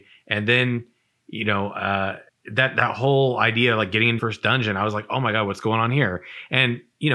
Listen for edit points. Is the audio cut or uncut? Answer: cut